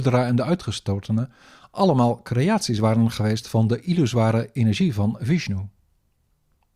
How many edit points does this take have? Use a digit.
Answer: 0